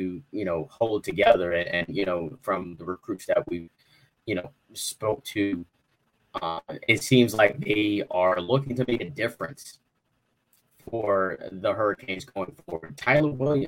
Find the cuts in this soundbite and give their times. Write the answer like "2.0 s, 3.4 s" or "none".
none